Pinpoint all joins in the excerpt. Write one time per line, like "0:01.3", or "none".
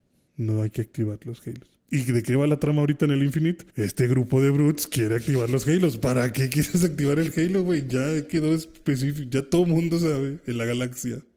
0:01.8
0:03.7